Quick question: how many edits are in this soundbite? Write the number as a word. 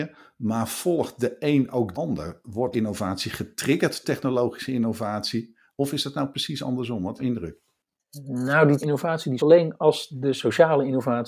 six